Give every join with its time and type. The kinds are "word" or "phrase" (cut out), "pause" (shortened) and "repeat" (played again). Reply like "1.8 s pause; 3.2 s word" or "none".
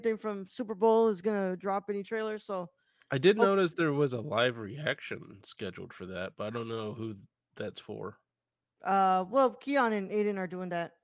none